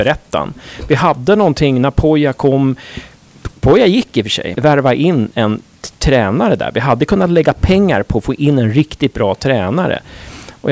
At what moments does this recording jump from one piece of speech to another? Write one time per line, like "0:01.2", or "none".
0:04.5